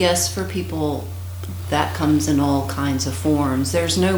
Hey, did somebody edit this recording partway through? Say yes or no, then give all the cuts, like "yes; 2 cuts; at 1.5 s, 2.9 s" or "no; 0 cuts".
no; 0 cuts